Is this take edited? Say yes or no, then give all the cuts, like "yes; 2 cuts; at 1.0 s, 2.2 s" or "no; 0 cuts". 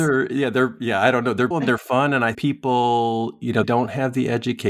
yes; 3 cuts; at 1.5 s, 2.3 s, 3.6 s